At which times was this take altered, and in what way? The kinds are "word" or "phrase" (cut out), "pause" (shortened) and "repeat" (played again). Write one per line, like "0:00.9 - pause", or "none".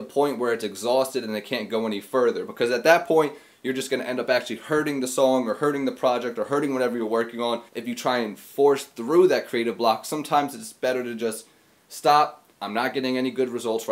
0:07.7 - pause
0:12.5 - pause

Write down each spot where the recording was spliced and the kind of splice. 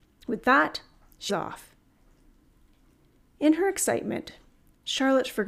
0:01.3 - word

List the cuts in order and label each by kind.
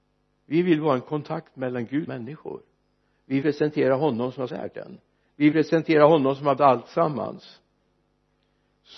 0:02.1 - word
0:03.4 - word
0:04.5 - phrase
0:05.5 - word
0:06.6 - word

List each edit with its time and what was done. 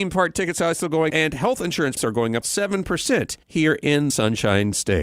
0:01.1 - word
0:02.0 - word
0:02.4 - word
0:03.4 - pause
0:04.1 - word

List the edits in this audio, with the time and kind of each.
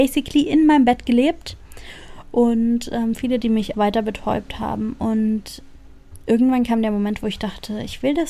0:03.4 - phrase
0:03.7 - word

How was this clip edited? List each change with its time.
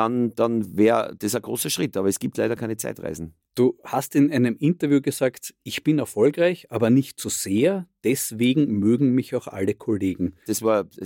none

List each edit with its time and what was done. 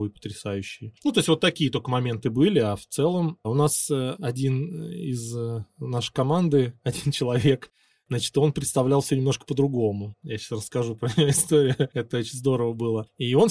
none

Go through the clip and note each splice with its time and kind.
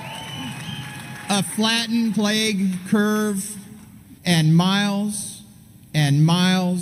0:02.1 - word
0:04.2 - pause

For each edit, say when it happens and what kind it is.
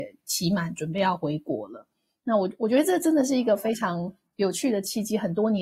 none

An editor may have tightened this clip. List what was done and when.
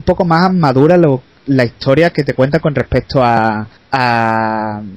0:03.8 - pause

